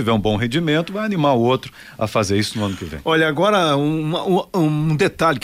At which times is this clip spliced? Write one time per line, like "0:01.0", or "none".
none